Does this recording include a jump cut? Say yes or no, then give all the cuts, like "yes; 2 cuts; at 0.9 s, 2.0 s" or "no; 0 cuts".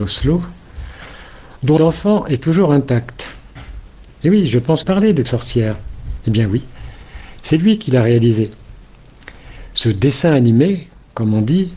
yes; 3 cuts; at 1.8 s, 4.8 s, 5.2 s